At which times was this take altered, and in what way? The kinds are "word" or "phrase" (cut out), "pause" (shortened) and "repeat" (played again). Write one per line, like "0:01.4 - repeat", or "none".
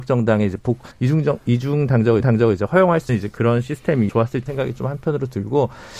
0:00.9 - pause
0:02.2 - repeat
0:03.1 - word
0:04.1 - word
0:04.5 - word